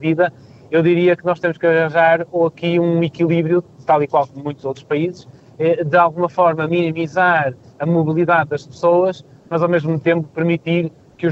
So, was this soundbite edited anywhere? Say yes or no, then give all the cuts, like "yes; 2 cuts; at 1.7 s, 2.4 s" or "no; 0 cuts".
no; 0 cuts